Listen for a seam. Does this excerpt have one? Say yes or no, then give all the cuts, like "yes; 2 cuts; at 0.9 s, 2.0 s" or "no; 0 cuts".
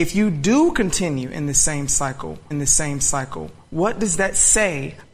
yes; 1 cut; at 2.5 s